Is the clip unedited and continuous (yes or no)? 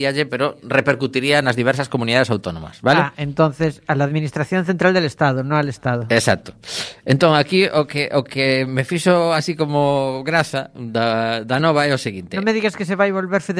yes